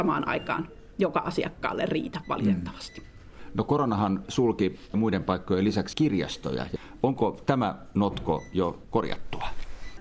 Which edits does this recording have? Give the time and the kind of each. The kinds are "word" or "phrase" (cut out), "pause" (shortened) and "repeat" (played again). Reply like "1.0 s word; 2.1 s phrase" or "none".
4.9 s word; 5.9 s word; 8.9 s word